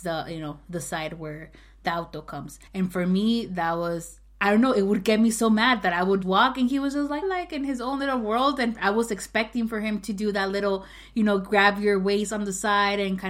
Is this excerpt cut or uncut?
cut